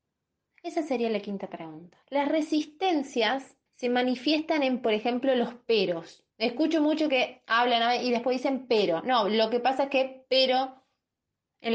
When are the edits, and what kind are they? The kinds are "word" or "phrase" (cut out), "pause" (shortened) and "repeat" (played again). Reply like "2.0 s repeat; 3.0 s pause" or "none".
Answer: 2.0 s pause; 3.7 s pause; 6.3 s pause